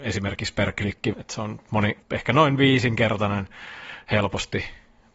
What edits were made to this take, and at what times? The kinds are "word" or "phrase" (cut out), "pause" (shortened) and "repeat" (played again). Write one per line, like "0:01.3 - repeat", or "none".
0:01.1 - word
0:02.0 - pause